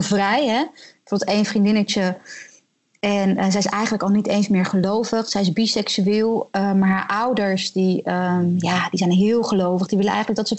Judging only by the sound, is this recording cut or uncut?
uncut